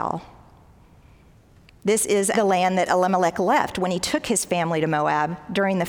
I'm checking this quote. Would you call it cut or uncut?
cut